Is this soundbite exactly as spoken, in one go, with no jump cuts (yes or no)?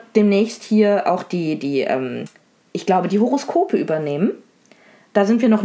yes